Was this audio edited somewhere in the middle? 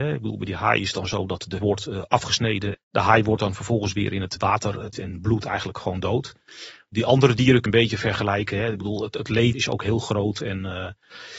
yes; 5 cuts; at 1.6 s, 2.7 s, 4.9 s, 7.7 s, 9.5 s

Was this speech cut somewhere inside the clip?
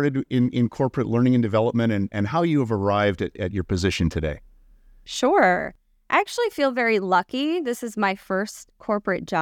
no; 0 cuts

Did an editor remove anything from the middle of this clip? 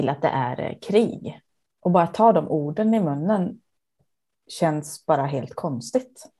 no; 0 cuts

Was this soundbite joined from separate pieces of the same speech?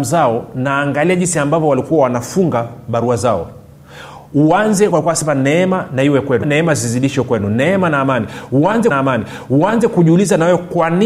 yes; 3 cuts; at 4.9 s, 6.4 s, 8.9 s

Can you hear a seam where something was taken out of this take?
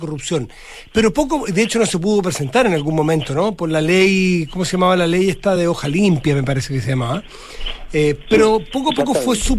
no; 0 cuts

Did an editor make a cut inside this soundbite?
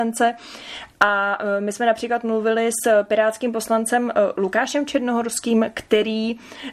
no; 0 cuts

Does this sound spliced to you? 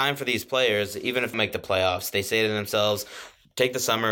yes; 1 cut; at 1.3 s

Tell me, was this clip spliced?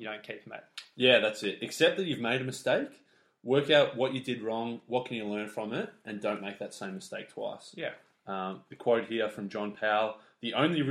no; 0 cuts

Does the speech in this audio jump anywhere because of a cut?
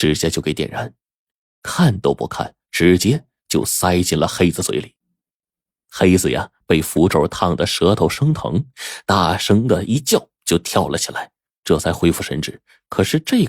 yes; 1 cut; at 2.6 s

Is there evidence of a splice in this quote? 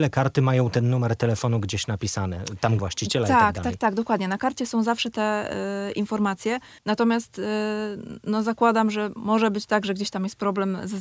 yes; 2 cuts; at 2.8 s, 6.8 s

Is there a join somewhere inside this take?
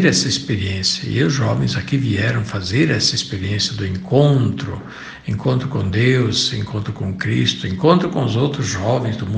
no; 0 cuts

